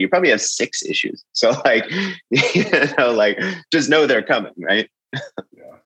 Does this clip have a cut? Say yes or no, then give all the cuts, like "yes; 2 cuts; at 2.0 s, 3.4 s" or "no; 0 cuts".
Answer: no; 0 cuts